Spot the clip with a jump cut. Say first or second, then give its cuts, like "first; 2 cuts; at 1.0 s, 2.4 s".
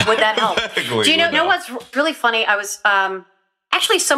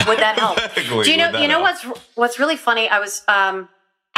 first; 2 cuts; at 1.3 s, 1.9 s